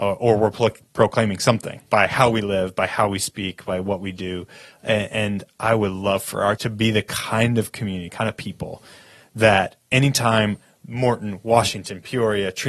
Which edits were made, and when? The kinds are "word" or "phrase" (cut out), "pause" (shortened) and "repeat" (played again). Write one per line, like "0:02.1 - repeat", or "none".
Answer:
0:01.9 - pause
0:06.6 - word